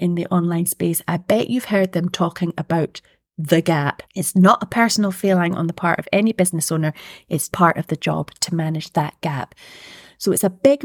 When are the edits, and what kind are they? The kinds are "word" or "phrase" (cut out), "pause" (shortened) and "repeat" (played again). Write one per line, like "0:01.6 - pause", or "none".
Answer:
0:04.1 - pause
0:07.5 - word